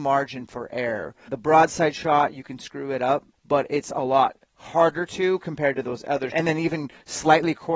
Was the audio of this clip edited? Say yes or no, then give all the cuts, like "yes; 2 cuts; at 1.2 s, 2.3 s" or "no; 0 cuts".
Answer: yes; 2 cuts; at 1.3 s, 6.3 s